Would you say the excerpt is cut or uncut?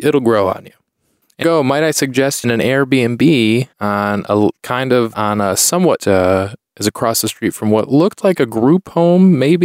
cut